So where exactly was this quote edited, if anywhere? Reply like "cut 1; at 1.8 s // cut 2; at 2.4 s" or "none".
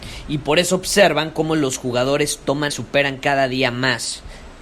cut 1; at 2.7 s

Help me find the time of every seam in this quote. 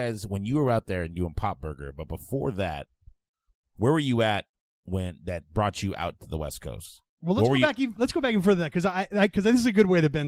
none

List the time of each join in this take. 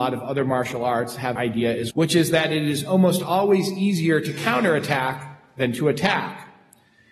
cut 1; at 1.4 s // cut 2; at 1.9 s

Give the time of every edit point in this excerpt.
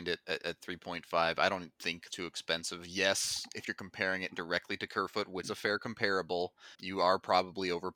cut 1; at 2.1 s // cut 2; at 5.4 s // cut 3; at 6.7 s

